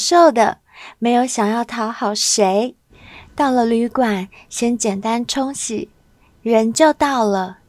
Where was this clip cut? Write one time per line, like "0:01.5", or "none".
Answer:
0:06.3